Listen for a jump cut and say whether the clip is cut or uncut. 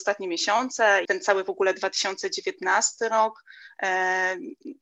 cut